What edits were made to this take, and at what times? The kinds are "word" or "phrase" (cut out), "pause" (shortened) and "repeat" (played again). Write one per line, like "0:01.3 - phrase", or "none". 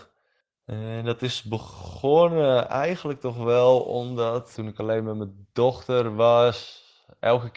none